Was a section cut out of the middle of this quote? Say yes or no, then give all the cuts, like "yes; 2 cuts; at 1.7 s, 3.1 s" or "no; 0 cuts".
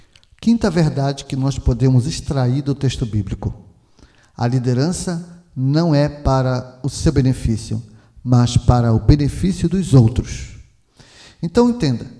no; 0 cuts